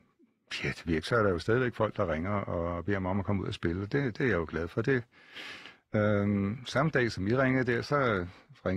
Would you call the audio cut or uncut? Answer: uncut